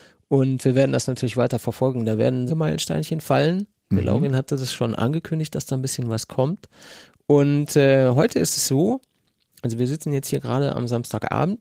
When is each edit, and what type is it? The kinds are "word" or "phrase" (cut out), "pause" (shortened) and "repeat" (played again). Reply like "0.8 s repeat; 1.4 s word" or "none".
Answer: 2.5 s phrase